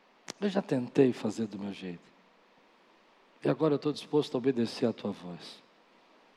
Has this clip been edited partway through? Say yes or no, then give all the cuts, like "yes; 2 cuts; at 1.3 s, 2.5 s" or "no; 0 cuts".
no; 0 cuts